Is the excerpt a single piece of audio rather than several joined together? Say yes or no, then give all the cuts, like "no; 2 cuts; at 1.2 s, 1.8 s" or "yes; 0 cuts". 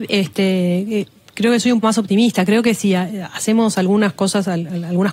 no; 1 cut; at 1.8 s